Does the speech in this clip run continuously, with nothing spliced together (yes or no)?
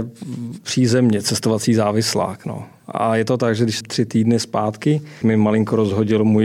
no